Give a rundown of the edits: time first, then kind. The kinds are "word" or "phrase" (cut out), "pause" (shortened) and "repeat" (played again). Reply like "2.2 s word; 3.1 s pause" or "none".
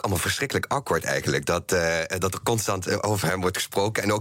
none